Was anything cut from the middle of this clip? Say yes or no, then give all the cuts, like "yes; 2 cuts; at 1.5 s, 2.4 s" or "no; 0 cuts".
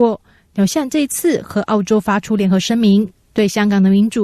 yes; 1 cut; at 3.2 s